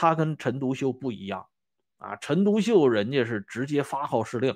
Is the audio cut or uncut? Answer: uncut